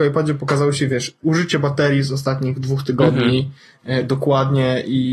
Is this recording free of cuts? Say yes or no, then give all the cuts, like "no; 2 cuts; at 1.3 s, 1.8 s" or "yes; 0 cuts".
yes; 0 cuts